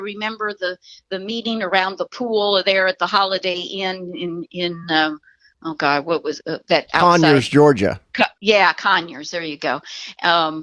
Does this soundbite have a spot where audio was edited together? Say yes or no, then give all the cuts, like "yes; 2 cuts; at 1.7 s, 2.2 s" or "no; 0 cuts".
no; 0 cuts